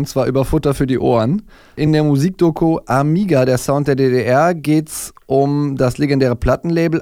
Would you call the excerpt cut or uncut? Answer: uncut